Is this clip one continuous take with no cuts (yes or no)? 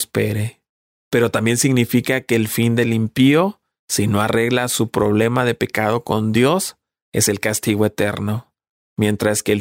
yes